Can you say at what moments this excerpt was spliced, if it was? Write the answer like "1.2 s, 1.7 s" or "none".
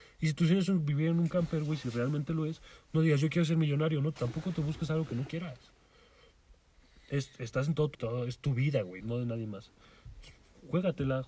4.2 s, 7.9 s, 9.0 s

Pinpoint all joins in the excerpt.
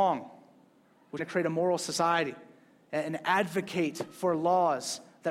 1.2 s

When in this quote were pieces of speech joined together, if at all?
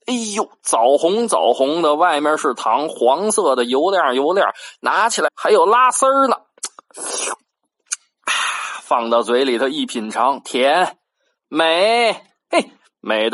5.3 s

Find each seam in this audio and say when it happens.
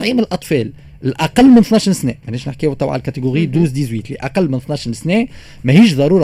2.2 s

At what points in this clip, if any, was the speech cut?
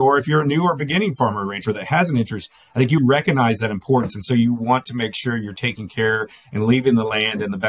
3.0 s

